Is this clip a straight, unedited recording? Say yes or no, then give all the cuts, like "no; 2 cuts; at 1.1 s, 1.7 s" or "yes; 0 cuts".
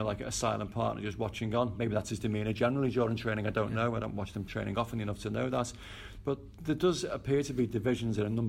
yes; 0 cuts